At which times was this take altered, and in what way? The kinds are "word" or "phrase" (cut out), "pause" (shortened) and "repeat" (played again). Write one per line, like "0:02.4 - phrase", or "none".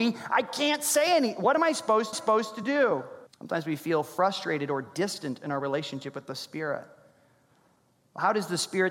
0:02.1 - repeat
0:03.3 - pause